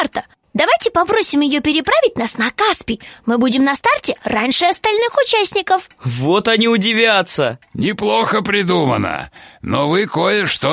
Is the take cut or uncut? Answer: uncut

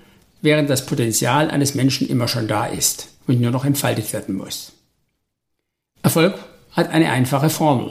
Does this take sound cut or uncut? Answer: uncut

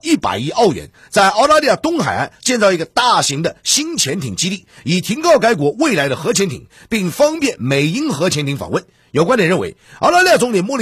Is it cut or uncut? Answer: uncut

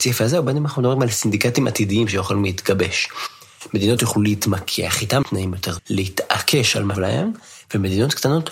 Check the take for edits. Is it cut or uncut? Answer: cut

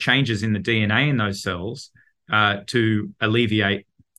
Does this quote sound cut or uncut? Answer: uncut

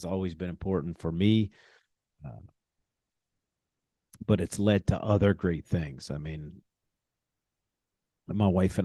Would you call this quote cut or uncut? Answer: uncut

